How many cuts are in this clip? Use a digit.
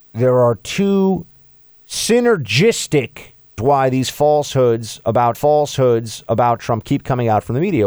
2